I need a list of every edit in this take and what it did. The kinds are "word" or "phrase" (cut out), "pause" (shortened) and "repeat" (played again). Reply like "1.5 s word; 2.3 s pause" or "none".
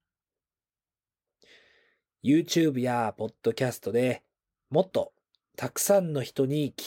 none